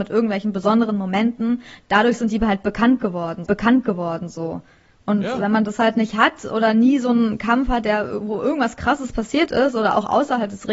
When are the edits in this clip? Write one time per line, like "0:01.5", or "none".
0:03.5